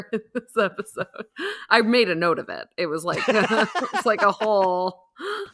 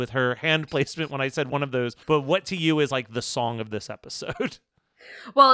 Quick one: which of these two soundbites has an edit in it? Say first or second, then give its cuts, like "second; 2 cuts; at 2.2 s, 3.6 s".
second; 1 cut; at 2.0 s